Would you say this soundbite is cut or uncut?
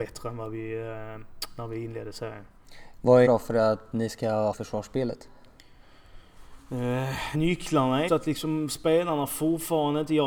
cut